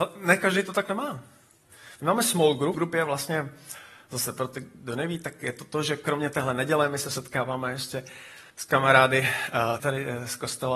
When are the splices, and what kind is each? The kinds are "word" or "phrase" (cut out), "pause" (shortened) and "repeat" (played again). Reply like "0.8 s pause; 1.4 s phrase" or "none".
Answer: 2.7 s word; 8.5 s pause; 9.8 s word